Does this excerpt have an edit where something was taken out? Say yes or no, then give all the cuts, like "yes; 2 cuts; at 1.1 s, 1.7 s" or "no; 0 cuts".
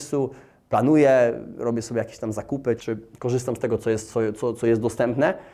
yes; 1 cut; at 2.8 s